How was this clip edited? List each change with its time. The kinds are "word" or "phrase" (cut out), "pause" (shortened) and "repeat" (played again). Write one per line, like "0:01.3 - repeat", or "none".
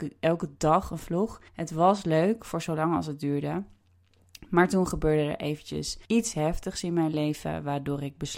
0:01.5 - pause
0:06.1 - pause